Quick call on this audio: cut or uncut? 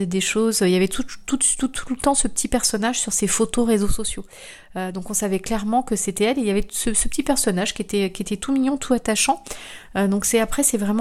uncut